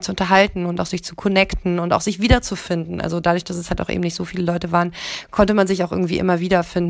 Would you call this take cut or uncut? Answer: uncut